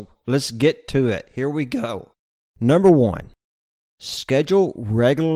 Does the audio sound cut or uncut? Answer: uncut